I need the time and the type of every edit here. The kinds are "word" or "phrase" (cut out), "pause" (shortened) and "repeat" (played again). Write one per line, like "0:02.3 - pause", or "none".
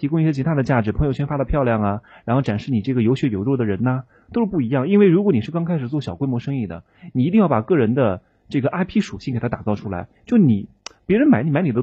none